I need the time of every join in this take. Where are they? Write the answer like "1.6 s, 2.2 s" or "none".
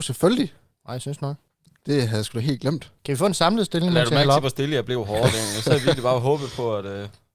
1.5 s, 3.0 s